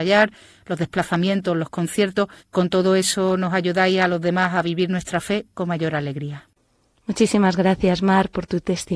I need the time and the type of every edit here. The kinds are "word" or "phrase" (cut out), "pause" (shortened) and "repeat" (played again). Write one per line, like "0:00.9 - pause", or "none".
none